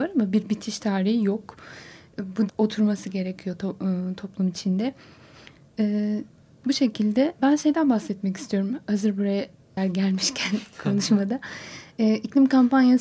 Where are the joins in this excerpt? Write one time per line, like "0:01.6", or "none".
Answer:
0:02.5
0:07.4
0:09.8